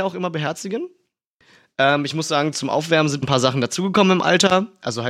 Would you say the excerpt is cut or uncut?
cut